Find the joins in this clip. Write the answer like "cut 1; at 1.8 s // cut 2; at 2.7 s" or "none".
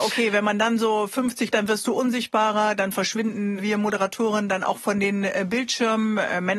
cut 1; at 1.5 s